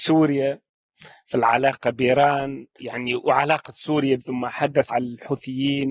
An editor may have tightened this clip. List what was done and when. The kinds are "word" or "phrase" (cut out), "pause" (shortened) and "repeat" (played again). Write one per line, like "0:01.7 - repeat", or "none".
0:02.8 - phrase
0:04.2 - word
0:04.9 - word